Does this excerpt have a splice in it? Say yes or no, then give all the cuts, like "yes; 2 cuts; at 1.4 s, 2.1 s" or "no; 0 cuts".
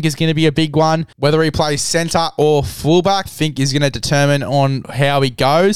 yes; 2 cuts; at 1.1 s, 3.3 s